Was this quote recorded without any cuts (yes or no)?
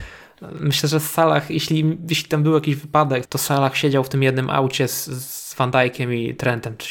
no